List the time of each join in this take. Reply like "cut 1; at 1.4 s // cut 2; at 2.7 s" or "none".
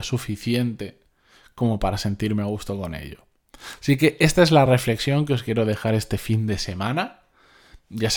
none